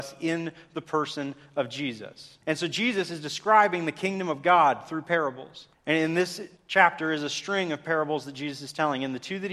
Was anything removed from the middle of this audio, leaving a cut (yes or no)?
yes